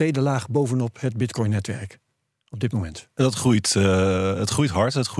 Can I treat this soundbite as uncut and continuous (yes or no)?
yes